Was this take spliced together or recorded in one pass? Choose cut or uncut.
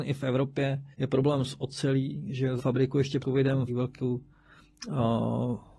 cut